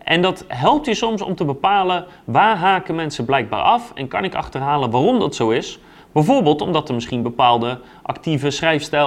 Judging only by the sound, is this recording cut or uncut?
uncut